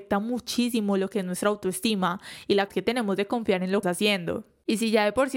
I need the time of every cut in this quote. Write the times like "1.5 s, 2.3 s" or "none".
2.7 s, 3.8 s